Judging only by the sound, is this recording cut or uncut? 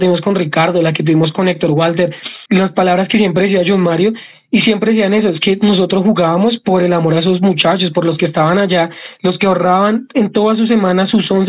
cut